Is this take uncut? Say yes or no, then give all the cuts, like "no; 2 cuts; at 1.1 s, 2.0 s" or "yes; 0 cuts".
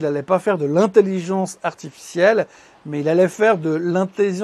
yes; 0 cuts